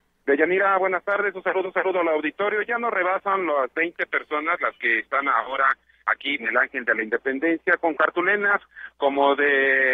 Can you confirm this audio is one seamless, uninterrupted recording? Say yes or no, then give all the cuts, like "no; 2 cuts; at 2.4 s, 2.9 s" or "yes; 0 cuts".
no; 2 cuts; at 1.6 s, 6.4 s